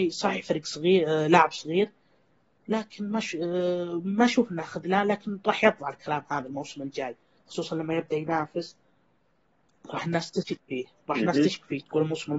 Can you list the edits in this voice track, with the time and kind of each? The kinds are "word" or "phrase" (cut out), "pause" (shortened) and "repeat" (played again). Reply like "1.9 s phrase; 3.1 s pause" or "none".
none